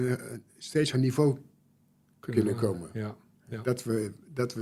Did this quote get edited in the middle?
yes; 1 cut; at 0.9 s

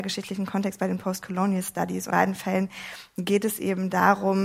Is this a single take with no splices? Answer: no; 1 cut; at 2.1 s

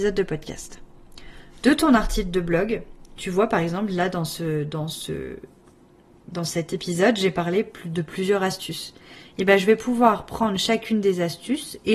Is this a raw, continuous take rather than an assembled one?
yes; 0 cuts

